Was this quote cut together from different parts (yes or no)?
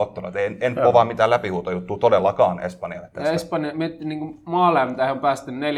no